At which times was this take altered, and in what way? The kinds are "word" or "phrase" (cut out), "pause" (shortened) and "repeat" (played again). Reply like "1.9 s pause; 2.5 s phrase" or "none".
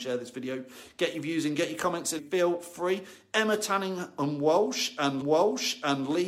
2.2 s phrase; 5.2 s repeat

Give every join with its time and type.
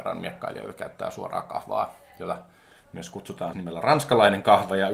3.5 s word

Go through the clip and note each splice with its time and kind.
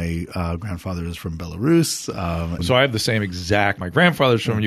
2.6 s word; 3.8 s word

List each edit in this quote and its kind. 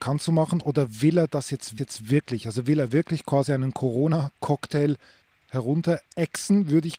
1.8 s repeat; 6.1 s pause

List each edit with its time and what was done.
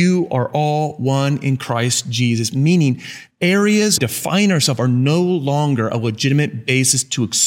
3.3 s word; 4.0 s phrase

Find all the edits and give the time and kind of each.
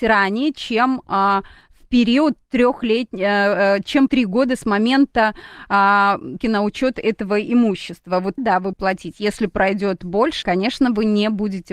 4.1 s word; 6.4 s word; 8.4 s word; 8.7 s word; 10.4 s word

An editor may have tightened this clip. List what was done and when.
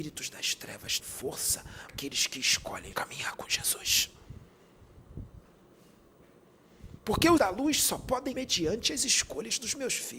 1.0 s word; 1.9 s word; 2.9 s word; 7.4 s word; 8.3 s word

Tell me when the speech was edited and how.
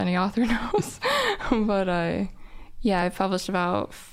none

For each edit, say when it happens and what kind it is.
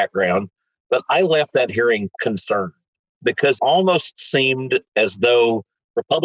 2.1 s word; 3.6 s word

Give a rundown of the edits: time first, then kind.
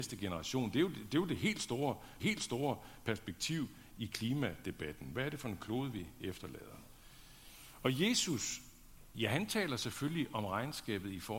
2.2 s repeat

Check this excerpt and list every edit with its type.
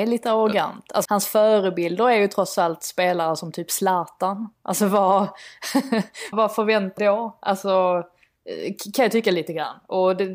1.0 s word; 6.3 s word; 7.0 s phrase

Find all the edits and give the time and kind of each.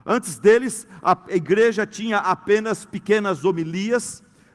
none

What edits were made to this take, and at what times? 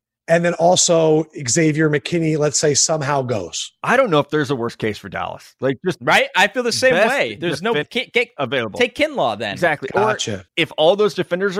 7.8 s word; 10.5 s pause

